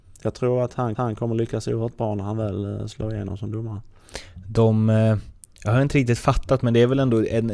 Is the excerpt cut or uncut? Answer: cut